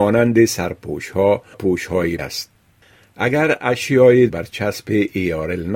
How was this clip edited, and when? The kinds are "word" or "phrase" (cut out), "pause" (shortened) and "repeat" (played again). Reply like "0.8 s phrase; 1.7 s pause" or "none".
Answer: 1.5 s word; 2.2 s word; 4.3 s word